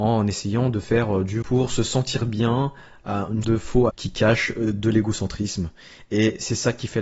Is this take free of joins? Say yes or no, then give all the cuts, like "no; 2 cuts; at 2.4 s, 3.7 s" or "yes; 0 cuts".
no; 3 cuts; at 1.4 s, 3.4 s, 3.9 s